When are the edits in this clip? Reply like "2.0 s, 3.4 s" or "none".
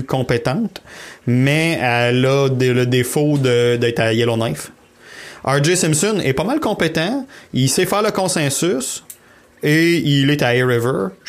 none